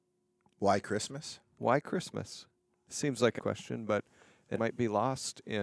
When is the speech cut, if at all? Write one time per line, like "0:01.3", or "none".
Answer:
0:03.4
0:04.6